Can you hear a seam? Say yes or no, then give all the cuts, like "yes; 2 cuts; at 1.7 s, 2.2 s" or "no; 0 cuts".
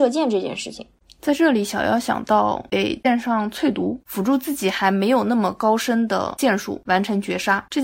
no; 0 cuts